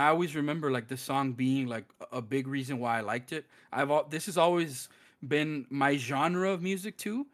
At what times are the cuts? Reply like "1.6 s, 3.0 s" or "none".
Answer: none